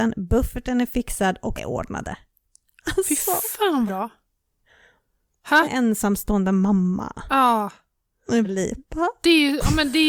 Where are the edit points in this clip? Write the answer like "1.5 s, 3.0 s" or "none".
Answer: 1.6 s, 3.9 s, 5.6 s, 8.4 s